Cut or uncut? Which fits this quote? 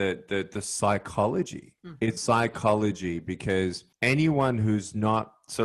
cut